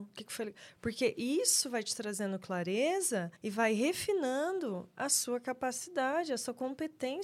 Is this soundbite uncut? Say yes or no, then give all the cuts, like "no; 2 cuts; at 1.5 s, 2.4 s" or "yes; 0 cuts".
no; 1 cut; at 3.4 s